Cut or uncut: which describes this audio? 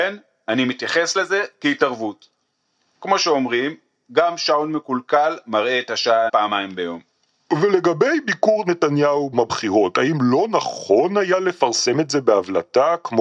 cut